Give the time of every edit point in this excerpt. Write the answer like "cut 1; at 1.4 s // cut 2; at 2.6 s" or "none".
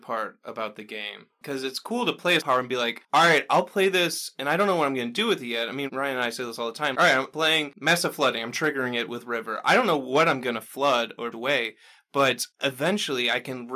cut 1; at 2.4 s // cut 2; at 6.9 s // cut 3; at 11.3 s